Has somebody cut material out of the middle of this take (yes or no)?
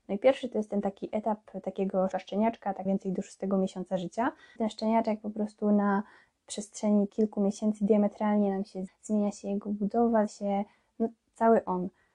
yes